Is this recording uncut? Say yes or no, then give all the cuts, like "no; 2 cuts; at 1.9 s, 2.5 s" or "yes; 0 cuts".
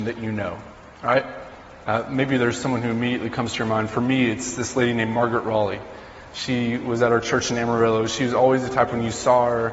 yes; 0 cuts